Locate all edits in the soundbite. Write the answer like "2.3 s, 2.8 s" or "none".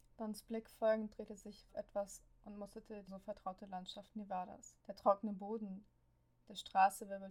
1.7 s, 3.1 s, 4.8 s